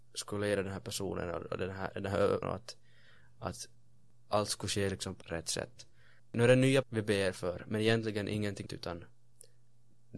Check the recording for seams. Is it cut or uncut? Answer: cut